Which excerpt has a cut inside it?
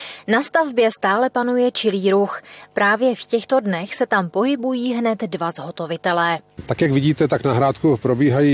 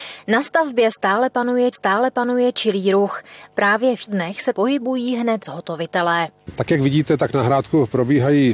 second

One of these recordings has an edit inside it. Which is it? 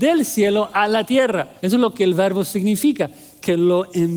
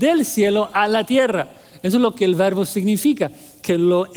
first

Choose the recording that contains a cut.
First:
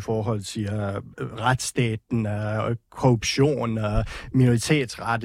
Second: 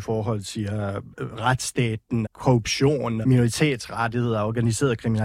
second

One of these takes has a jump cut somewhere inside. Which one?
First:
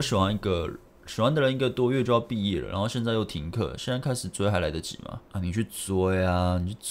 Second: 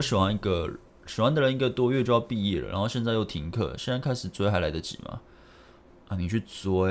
first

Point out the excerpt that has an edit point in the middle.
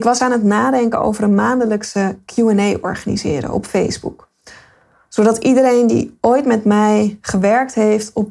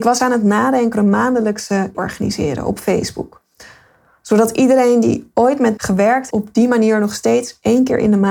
second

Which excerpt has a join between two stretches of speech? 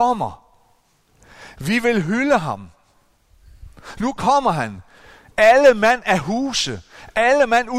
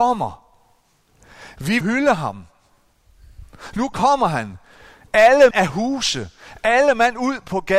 second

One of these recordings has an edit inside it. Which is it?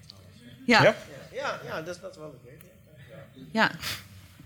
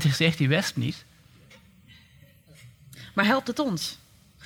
first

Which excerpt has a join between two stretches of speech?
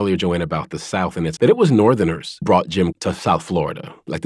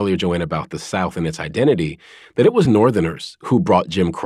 first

